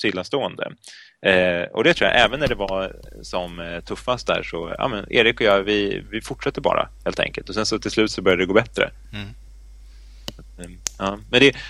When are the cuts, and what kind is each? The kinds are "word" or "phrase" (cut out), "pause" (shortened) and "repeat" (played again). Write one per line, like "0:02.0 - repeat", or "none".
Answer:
none